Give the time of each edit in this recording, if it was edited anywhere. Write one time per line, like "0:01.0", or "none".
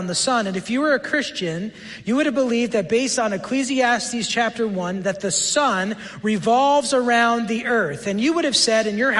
none